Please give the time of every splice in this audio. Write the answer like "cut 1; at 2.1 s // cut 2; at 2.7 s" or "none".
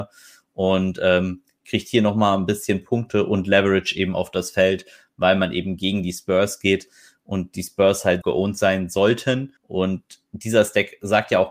cut 1; at 8.2 s // cut 2; at 9.6 s